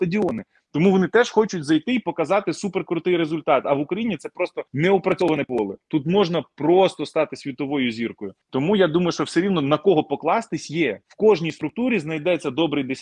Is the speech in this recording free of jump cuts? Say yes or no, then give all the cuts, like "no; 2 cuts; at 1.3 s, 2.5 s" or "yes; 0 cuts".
no; 3 cuts; at 4.7 s, 8.4 s, 11.0 s